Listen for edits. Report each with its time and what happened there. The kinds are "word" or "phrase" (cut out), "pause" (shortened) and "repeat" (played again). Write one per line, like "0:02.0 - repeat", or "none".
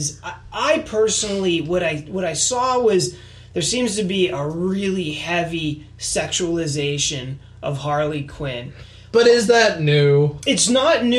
none